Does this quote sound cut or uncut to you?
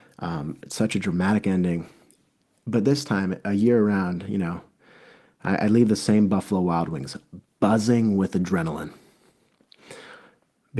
uncut